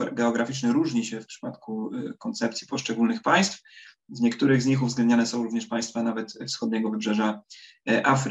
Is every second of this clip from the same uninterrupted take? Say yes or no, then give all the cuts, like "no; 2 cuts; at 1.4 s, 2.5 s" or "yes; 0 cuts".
yes; 0 cuts